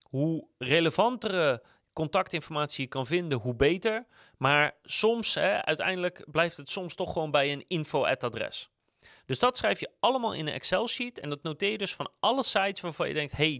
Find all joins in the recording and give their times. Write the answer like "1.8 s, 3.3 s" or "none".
none